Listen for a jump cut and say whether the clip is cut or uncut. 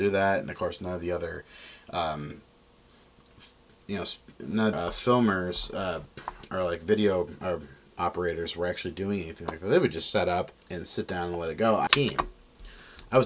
cut